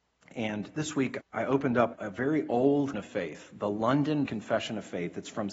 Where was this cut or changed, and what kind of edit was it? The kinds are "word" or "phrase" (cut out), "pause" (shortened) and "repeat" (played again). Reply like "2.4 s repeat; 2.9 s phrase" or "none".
1.2 s word; 1.9 s word; 2.9 s word; 4.3 s word